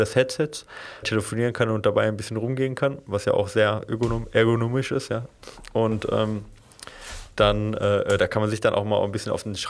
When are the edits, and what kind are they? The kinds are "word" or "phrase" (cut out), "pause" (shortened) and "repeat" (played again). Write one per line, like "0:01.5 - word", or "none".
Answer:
0:01.0 - phrase